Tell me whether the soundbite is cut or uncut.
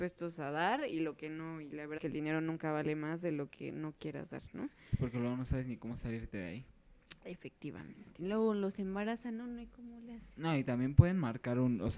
cut